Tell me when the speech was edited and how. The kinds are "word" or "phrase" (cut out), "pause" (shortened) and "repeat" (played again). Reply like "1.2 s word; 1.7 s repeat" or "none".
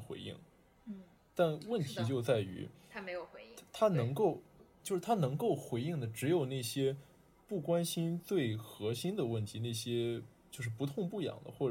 4.8 s word

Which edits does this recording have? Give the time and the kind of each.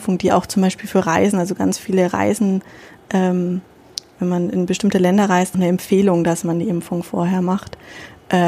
5.5 s phrase

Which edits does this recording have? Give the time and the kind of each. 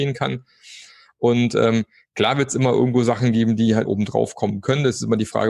3.9 s word

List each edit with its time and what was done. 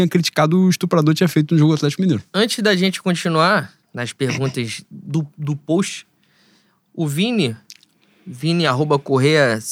3.8 s pause

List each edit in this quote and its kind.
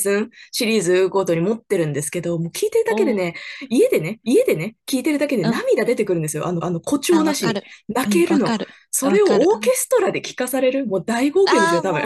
4.2 s repeat; 6.6 s repeat

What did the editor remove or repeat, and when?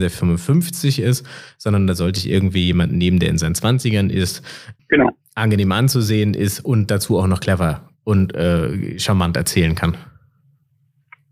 4.8 s word

